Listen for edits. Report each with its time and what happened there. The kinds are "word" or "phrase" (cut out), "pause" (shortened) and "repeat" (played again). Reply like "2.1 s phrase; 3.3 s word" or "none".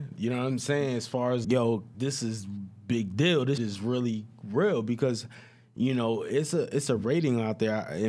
1.4 s word; 1.9 s word; 3.6 s word